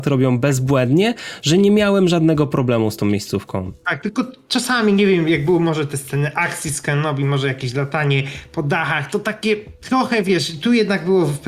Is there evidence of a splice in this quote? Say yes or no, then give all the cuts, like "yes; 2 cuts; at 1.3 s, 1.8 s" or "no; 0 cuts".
no; 0 cuts